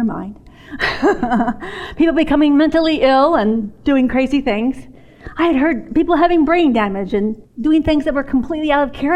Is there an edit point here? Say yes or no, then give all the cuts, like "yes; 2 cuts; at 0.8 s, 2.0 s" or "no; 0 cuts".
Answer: no; 0 cuts